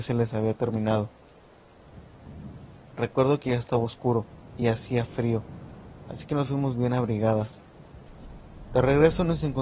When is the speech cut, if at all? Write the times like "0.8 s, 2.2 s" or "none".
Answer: none